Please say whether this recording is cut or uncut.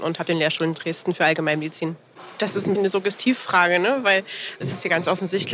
cut